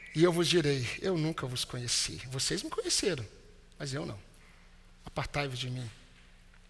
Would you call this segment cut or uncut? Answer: uncut